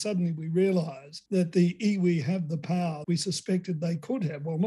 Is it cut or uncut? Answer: cut